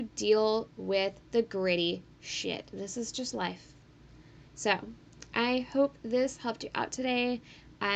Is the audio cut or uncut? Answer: cut